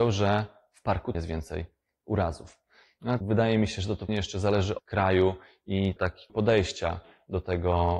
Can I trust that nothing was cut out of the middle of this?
no; 6 cuts; at 1.1 s, 3.2 s, 4.1 s, 4.8 s, 6.0 s, 6.3 s

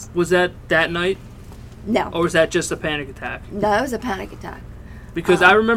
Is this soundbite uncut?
yes; 0 cuts

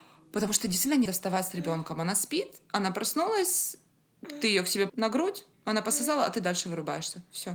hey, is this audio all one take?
no; 3 cuts; at 1.1 s, 4.9 s, 5.5 s

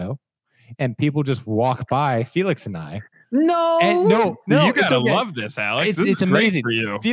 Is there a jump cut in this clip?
no; 0 cuts

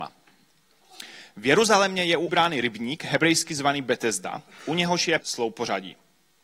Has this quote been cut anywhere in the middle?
yes; 2 cuts; at 2.3 s, 5.2 s

